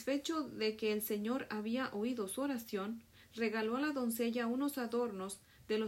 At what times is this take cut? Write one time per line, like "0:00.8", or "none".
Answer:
none